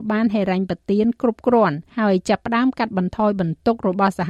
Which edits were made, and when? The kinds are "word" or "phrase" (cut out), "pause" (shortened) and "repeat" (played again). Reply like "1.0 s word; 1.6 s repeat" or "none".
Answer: 1.9 s pause

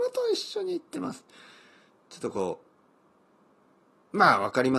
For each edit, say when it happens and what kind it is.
none

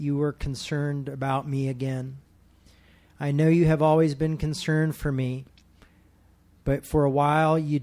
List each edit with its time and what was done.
none

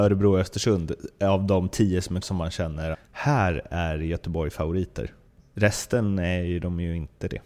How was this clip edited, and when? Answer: 2.2 s word; 2.9 s word; 5.4 s pause

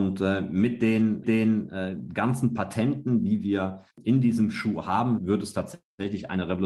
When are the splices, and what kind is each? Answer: 1.2 s repeat; 3.9 s pause; 5.2 s word

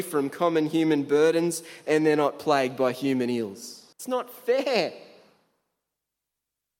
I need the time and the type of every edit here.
3.9 s pause

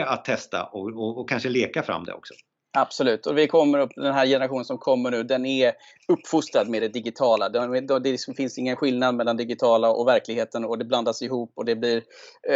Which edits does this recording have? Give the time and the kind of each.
none

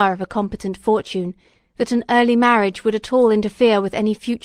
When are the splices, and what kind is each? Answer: none

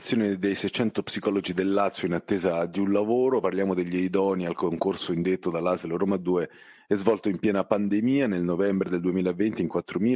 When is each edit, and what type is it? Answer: none

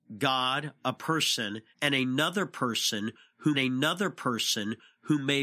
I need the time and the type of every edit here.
1.7 s pause; 3.5 s repeat

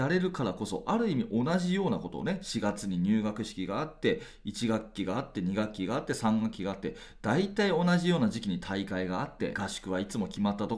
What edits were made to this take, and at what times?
9.5 s word

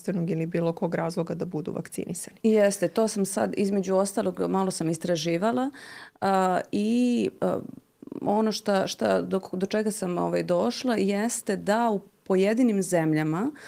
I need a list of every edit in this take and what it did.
none

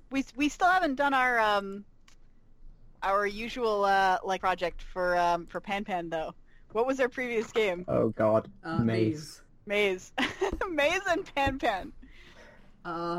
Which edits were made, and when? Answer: 4.4 s word; 9.5 s pause

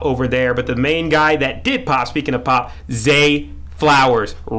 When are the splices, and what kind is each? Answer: none

